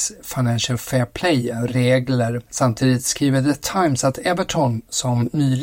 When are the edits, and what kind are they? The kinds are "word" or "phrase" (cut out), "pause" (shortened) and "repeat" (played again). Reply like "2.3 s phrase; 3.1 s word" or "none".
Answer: 2.5 s pause